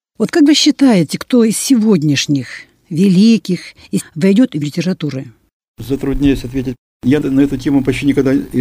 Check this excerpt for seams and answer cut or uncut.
cut